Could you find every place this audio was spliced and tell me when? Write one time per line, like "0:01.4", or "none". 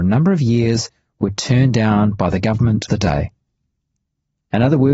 0:02.9